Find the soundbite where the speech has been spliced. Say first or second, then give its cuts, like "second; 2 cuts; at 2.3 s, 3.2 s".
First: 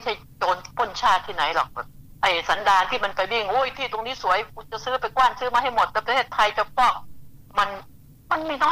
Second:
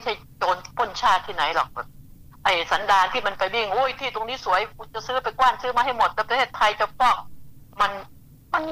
first; 1 cut; at 2.2 s